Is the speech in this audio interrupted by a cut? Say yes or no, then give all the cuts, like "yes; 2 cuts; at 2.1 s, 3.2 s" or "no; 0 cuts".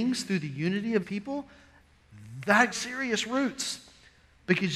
yes; 2 cuts; at 1.0 s, 2.7 s